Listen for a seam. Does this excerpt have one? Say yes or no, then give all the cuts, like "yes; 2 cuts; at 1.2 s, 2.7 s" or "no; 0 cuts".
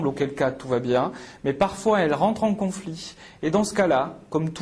no; 0 cuts